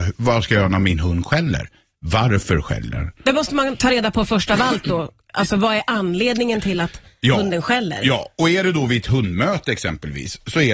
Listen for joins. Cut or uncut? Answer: uncut